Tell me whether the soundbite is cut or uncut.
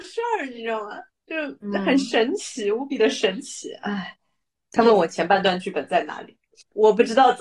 uncut